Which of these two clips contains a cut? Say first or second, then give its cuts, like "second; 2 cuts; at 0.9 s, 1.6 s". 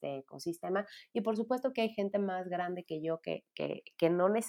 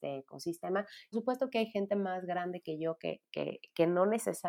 second; 1 cut; at 1.1 s